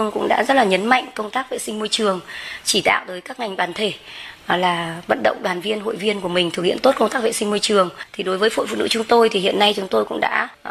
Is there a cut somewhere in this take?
no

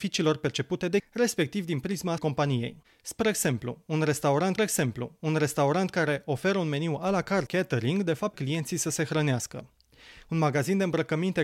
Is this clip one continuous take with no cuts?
no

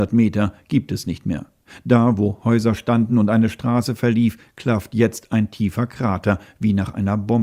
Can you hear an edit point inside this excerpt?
no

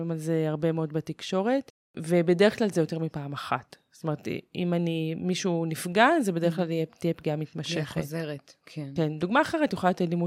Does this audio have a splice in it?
no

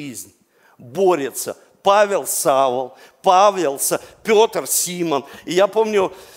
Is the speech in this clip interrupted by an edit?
no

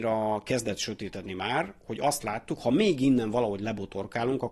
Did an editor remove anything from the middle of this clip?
no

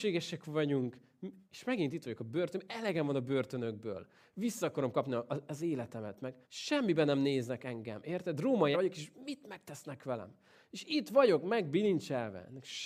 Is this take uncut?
no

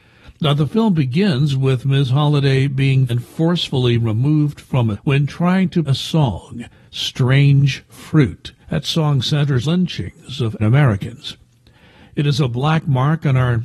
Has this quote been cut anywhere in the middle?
yes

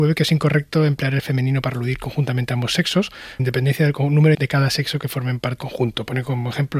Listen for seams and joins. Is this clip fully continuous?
no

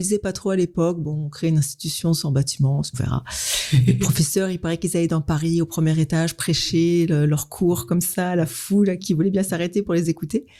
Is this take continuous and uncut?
no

